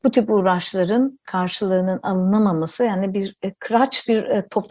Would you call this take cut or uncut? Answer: cut